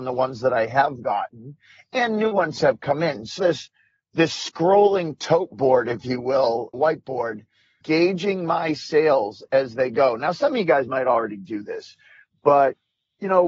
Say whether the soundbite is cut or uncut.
cut